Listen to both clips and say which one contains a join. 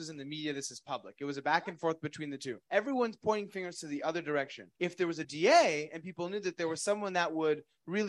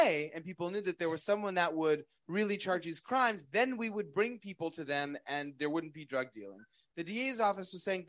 first; 3 cuts; at 2.6 s, 4.8 s, 5.2 s

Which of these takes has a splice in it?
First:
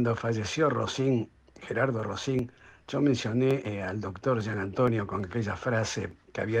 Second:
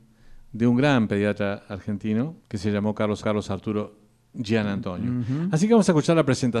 second; 2 cuts; at 2.4 s, 3.2 s

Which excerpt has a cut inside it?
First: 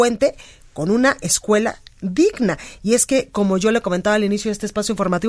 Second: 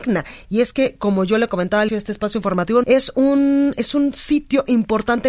second; 2 cuts; at 1.9 s, 2.8 s

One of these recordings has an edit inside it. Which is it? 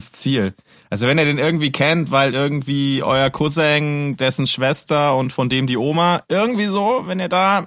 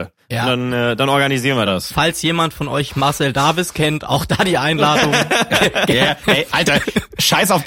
second; 1 cut; at 1.7 s

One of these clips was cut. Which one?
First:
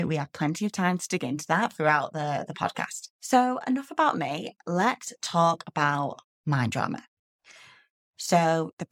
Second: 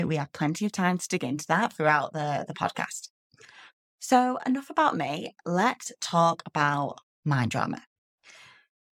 first; 1 cut; at 3.1 s

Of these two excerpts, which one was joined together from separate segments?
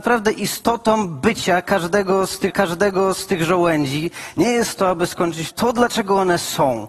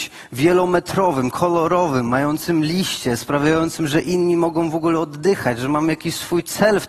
first; 2 cuts; at 2.5 s, 5.5 s

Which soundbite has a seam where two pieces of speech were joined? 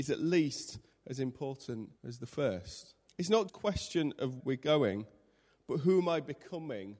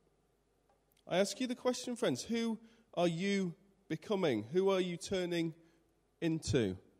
first; 4 cuts; at 2.0 s, 3.1 s, 3.5 s, 4.4 s

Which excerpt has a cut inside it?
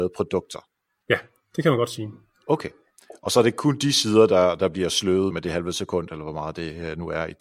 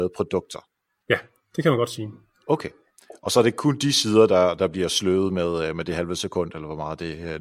first; 1 cut; at 5.3 s

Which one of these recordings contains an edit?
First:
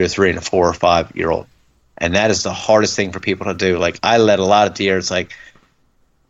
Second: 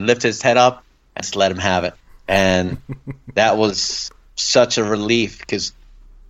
second; 2 cuts; at 1.2 s, 2.0 s

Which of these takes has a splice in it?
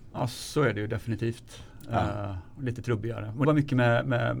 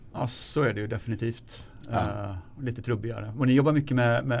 first; 1 cut; at 3.4 s

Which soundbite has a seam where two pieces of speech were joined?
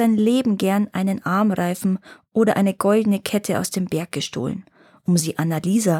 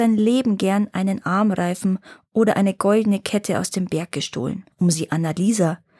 second; 1 cut; at 4.7 s

